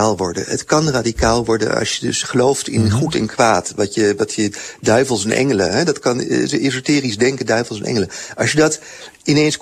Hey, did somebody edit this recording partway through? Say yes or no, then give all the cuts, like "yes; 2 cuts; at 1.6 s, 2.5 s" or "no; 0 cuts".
no; 0 cuts